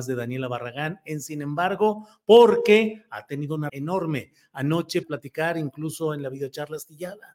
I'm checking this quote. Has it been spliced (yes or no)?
yes